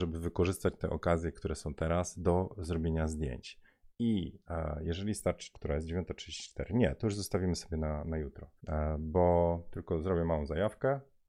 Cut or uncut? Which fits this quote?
cut